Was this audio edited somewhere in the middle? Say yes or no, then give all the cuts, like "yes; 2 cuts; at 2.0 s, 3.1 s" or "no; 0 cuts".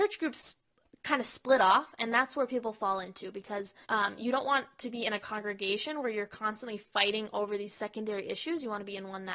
yes; 1 cut; at 3.8 s